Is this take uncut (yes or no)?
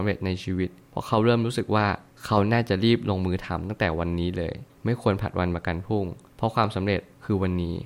yes